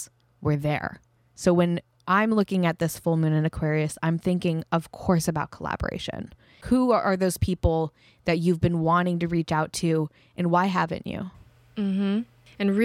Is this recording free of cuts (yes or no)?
yes